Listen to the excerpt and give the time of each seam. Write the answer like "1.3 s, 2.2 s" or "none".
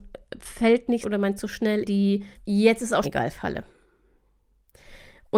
1.0 s, 1.4 s, 1.8 s, 2.3 s, 3.0 s